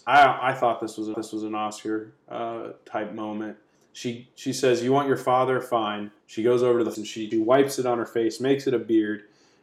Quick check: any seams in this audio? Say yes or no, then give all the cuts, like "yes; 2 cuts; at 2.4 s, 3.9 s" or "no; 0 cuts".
yes; 5 cuts; at 1.1 s, 3.7 s, 6.2 s, 6.9 s, 7.3 s